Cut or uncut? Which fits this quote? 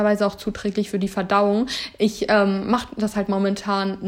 uncut